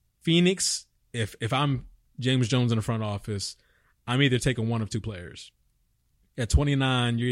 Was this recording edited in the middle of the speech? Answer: no; 0 cuts

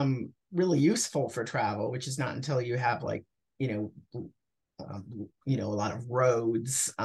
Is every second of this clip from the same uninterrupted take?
yes; 0 cuts

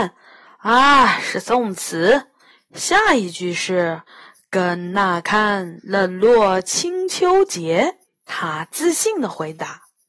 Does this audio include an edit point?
yes; 2 cuts; at 4.1 s, 8.0 s

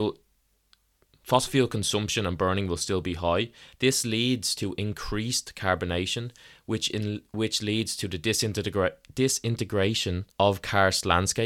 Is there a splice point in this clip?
yes; 1 cut; at 10.3 s

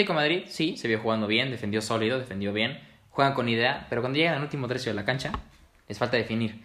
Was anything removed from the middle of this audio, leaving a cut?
no; 0 cuts

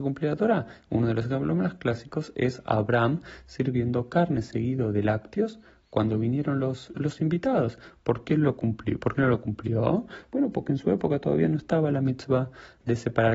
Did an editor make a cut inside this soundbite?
no; 0 cuts

